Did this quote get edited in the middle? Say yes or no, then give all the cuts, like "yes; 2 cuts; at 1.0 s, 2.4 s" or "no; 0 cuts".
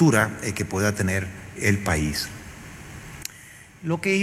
yes; 1 cut; at 1.6 s